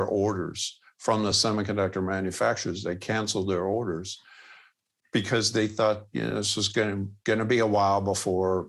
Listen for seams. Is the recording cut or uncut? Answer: uncut